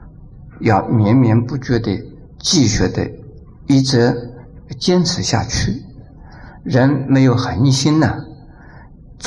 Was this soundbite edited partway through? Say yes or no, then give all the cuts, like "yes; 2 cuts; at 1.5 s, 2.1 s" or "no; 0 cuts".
no; 0 cuts